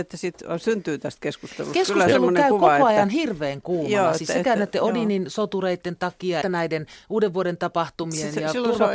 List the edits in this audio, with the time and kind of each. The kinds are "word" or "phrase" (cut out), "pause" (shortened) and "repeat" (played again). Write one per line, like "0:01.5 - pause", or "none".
0:06.4 - word